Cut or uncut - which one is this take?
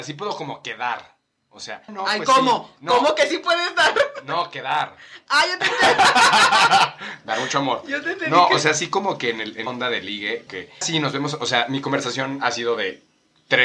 cut